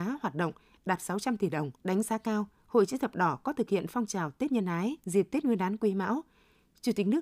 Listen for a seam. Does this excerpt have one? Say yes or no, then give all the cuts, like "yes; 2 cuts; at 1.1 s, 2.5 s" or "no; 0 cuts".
yes; 2 cuts; at 1.8 s, 5.0 s